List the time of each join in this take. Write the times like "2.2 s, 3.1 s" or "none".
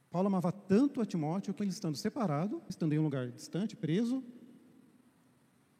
1.6 s, 2.7 s